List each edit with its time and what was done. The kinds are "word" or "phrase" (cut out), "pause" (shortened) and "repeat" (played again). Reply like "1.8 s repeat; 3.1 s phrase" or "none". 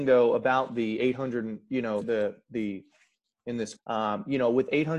2.0 s word; 3.3 s word; 3.8 s word